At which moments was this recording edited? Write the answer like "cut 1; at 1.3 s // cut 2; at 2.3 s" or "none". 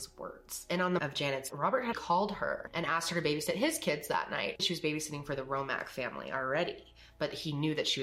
cut 1; at 1.0 s // cut 2; at 1.5 s // cut 3; at 1.9 s // cut 4; at 4.6 s